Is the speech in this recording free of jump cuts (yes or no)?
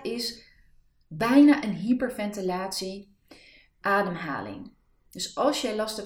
no